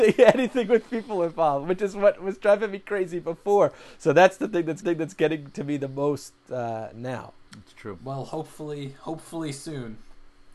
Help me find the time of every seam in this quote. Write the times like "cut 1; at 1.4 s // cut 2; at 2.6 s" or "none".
cut 1; at 4.8 s // cut 2; at 7.5 s